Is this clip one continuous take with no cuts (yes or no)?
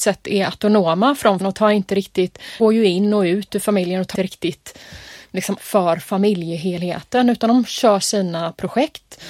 no